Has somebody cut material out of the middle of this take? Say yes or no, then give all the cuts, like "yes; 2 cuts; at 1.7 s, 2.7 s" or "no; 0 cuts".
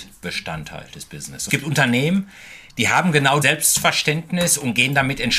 yes; 3 cuts; at 1.5 s, 2.7 s, 3.4 s